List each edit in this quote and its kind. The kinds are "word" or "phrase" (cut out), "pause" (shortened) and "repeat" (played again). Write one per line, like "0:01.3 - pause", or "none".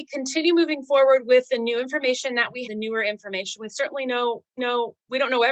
0:02.6 - word
0:04.6 - repeat